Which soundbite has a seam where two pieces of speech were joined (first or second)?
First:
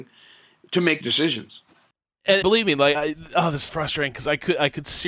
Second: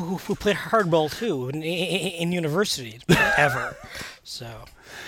first